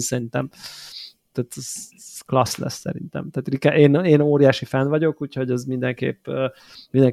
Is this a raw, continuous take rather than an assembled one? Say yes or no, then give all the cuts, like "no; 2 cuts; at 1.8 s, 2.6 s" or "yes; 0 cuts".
yes; 0 cuts